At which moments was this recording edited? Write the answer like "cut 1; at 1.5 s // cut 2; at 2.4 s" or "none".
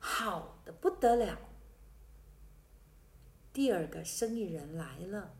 none